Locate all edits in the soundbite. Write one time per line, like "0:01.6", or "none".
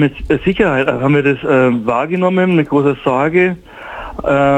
none